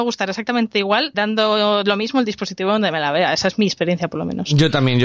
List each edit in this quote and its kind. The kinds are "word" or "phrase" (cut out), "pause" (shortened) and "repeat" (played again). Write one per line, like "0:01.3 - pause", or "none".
0:01.1 - word